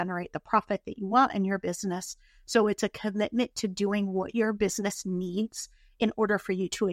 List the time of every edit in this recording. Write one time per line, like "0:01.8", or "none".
none